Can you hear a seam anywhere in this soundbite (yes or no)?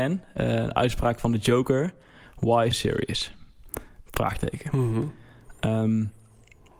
yes